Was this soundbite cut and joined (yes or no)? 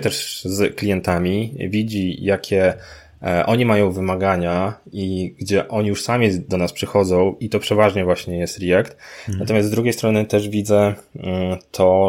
no